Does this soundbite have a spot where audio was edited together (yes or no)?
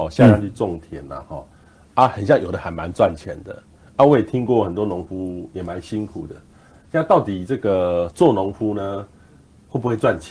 no